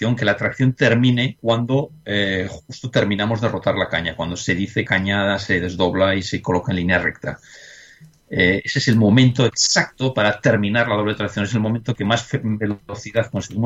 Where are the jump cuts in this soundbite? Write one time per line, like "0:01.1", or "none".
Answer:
0:04.9